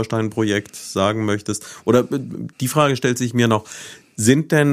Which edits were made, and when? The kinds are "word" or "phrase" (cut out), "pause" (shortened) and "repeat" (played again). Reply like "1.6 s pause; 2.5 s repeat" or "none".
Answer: 2.5 s pause

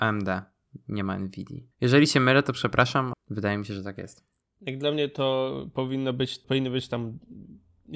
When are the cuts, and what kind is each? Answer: 1.7 s pause; 3.1 s word; 4.4 s pause; 6.4 s word

